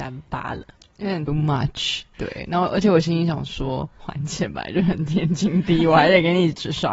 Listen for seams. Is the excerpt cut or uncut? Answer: cut